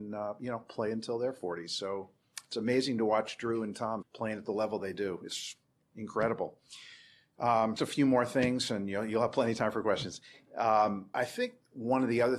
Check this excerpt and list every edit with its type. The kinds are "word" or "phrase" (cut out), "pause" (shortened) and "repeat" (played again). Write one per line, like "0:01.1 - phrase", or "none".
0:04.0 - word
0:07.8 - word
0:11.1 - word